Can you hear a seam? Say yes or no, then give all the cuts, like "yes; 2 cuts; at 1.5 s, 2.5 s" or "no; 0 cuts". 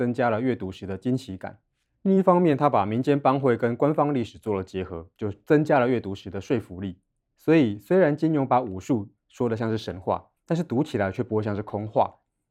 yes; 1 cut; at 10.4 s